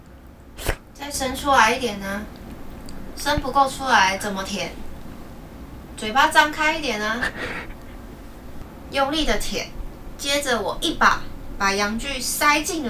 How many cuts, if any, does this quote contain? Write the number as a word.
zero